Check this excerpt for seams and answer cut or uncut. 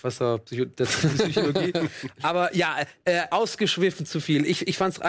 uncut